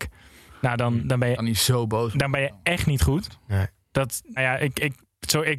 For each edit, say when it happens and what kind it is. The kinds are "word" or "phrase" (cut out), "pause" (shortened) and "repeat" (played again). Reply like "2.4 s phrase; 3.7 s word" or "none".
4.4 s word